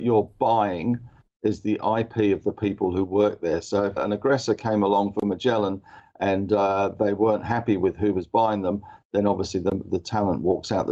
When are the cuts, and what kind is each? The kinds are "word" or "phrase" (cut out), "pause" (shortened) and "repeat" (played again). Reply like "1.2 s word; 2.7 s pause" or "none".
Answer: 4.0 s word

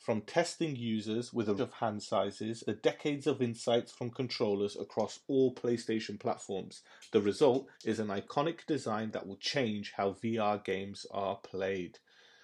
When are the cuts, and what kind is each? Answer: 1.6 s word; 2.7 s phrase; 7.7 s pause

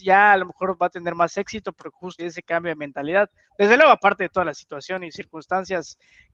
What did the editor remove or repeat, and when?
2.2 s word

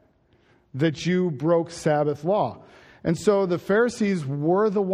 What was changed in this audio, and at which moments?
none

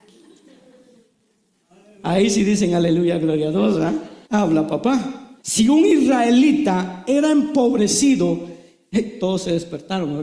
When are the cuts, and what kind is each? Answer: 4.2 s pause; 5.4 s pause

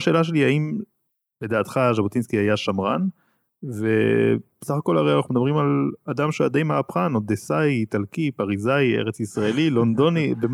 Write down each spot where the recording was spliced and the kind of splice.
none

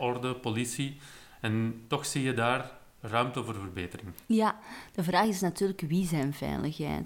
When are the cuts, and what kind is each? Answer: none

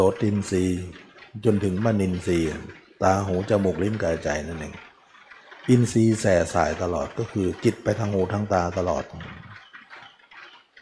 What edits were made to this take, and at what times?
none

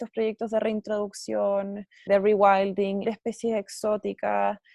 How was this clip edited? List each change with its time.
2.1 s word; 3.0 s word

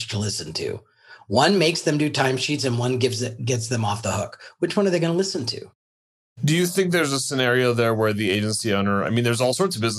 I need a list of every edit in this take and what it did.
none

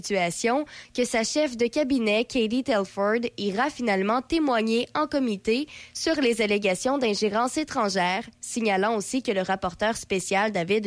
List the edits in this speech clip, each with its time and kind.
none

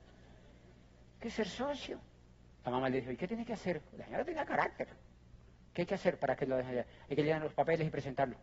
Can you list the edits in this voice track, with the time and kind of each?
none

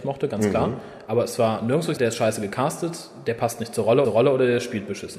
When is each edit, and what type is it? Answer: 2.0 s word; 4.0 s repeat

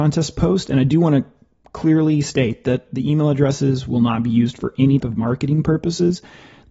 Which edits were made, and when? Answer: 2.9 s word; 5.0 s word

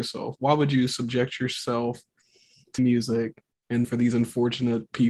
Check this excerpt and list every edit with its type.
2.8 s word; 3.8 s word

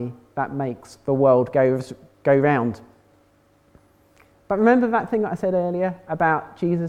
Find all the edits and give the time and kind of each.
none

